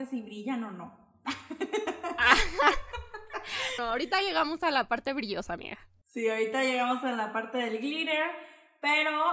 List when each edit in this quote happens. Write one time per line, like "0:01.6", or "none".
0:03.8